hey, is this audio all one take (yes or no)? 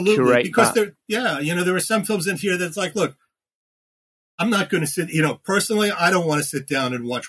yes